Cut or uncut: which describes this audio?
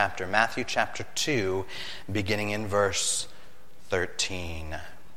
uncut